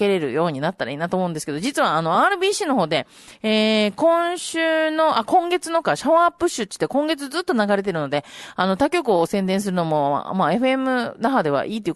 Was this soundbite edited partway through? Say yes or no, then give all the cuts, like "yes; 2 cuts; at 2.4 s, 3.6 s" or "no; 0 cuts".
no; 0 cuts